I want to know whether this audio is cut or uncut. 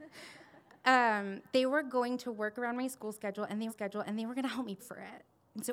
cut